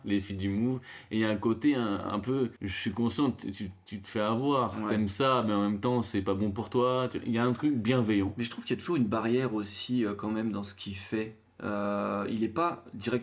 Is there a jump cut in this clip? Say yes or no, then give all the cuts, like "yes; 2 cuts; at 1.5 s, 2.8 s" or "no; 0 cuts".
yes; 1 cut; at 2.6 s